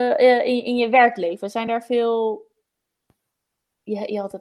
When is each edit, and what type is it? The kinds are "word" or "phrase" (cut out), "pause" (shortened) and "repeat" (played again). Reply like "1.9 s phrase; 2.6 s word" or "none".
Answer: none